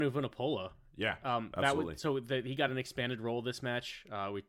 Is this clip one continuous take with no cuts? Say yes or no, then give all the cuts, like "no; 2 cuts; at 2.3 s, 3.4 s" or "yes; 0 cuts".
yes; 0 cuts